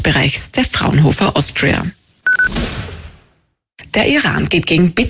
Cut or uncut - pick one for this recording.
uncut